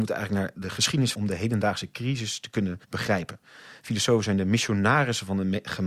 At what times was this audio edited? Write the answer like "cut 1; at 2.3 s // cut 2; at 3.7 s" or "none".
cut 1; at 1.1 s // cut 2; at 2.8 s